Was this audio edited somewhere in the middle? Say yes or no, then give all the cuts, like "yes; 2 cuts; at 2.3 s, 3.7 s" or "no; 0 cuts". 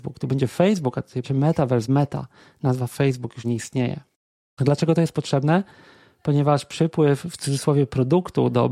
yes; 3 cuts; at 1.2 s, 1.9 s, 3.4 s